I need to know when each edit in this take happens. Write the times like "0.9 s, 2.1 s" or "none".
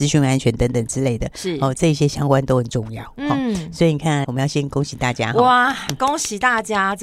4.2 s